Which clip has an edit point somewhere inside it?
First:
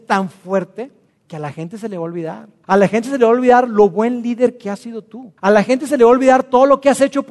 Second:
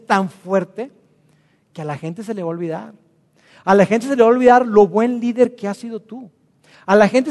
first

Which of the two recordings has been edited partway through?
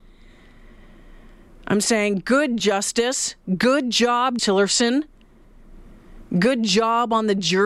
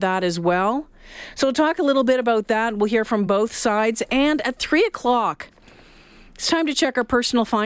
first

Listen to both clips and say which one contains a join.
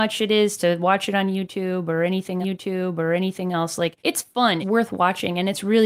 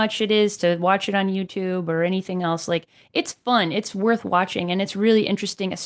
first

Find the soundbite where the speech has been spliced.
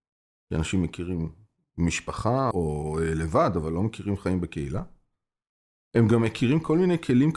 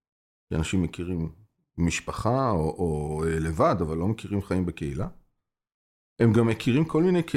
first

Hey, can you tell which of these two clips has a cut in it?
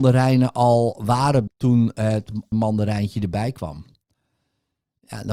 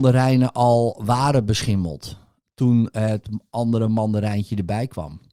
first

